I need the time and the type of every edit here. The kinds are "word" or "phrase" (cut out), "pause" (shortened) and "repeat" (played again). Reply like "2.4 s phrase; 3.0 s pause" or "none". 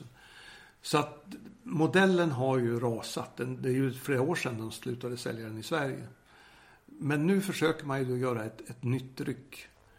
none